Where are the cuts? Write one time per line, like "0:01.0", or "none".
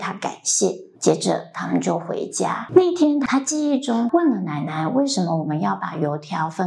0:00.9

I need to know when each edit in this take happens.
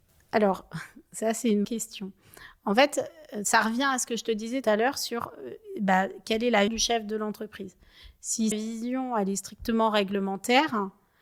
0:01.6
0:04.6
0:06.7
0:08.5

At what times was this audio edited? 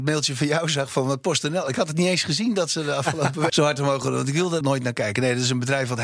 0:03.5
0:04.6

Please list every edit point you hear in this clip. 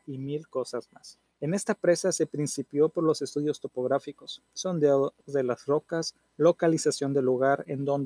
0:01.3
0:05.2

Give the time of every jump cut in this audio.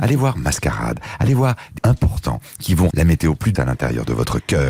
0:01.8
0:02.9
0:03.6

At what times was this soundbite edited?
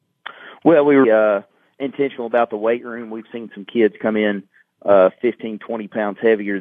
0:01.0

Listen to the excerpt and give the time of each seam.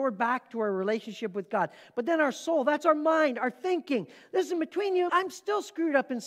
0:05.1

